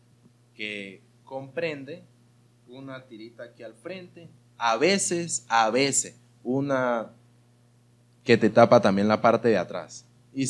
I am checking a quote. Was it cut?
no; 0 cuts

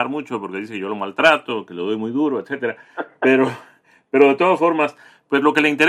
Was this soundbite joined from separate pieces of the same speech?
no; 0 cuts

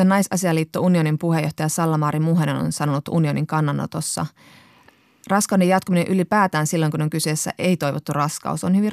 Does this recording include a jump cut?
no; 0 cuts

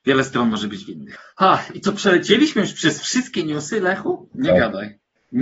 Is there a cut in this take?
no; 0 cuts

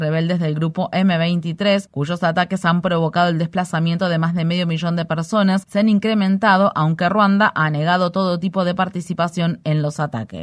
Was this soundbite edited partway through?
no; 0 cuts

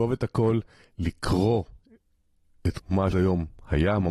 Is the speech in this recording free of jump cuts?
no; 2 cuts; at 2.8 s, 3.1 s

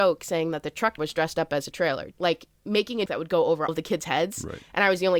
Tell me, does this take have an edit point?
yes; 5 cuts; at 1.0 s, 1.7 s, 2.1 s, 3.1 s, 3.7 s

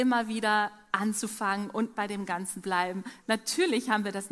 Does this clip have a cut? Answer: yes; 2 cuts; at 2.0 s, 2.6 s

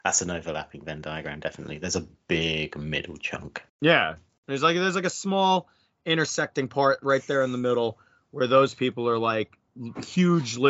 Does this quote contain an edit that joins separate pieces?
yes; 1 cut; at 3.7 s

